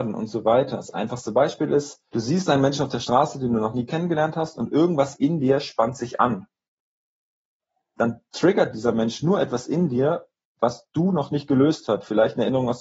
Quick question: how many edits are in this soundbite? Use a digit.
1